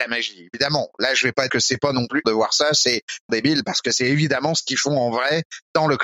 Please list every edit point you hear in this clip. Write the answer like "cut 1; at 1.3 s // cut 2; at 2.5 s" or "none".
cut 1; at 1.5 s // cut 2; at 2.2 s // cut 3; at 3.3 s